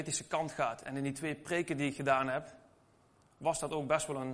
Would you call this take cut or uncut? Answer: uncut